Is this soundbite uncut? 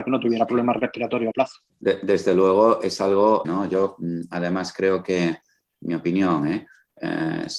no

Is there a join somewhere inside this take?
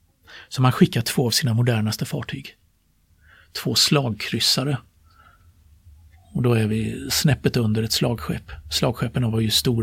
no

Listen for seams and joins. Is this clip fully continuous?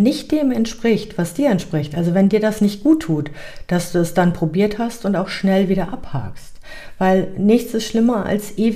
yes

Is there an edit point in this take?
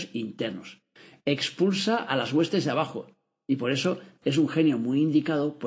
no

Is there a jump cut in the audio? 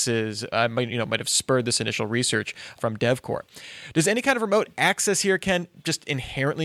yes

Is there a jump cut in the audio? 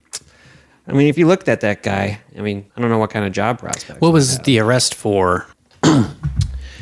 yes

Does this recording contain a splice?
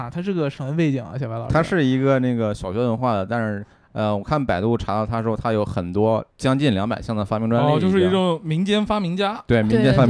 yes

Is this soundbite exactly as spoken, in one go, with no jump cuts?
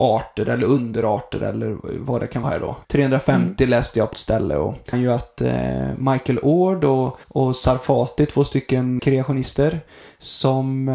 no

